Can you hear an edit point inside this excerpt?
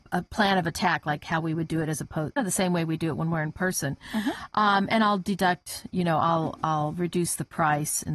yes; 1 cut; at 2.4 s

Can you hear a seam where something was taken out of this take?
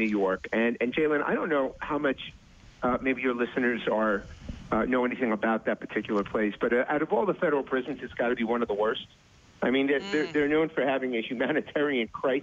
no; 0 cuts

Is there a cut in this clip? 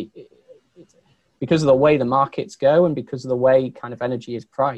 no; 0 cuts

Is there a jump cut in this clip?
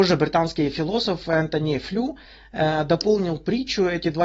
no; 0 cuts

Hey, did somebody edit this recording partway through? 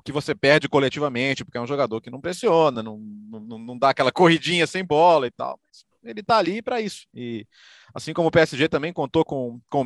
no; 0 cuts

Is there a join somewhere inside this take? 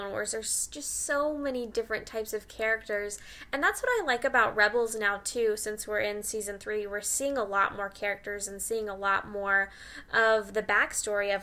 no; 0 cuts

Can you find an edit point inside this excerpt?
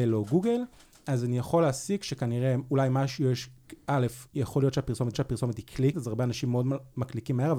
yes; 3 cuts; at 4.3 s, 5.1 s, 5.9 s

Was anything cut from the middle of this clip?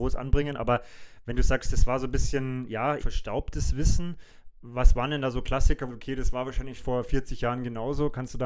yes; 3 cuts; at 3.0 s, 5.9 s, 6.8 s

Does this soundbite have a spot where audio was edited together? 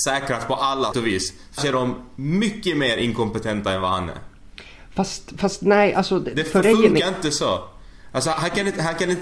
yes; 3 cuts; at 0.9 s, 1.6 s, 6.6 s

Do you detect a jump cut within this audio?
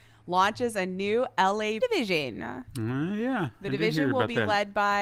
yes; 1 cut; at 1.8 s

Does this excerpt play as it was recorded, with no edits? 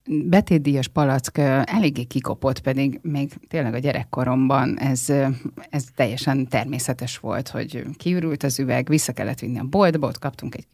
yes; 0 cuts

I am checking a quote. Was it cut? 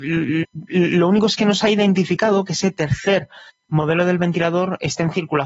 no; 0 cuts

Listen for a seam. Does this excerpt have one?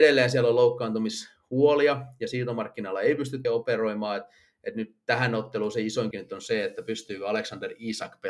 yes; 2 cuts; at 3.4 s, 6.1 s

